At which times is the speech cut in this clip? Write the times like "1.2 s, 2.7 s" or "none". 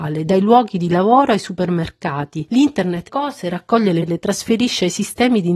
3.1 s, 4.0 s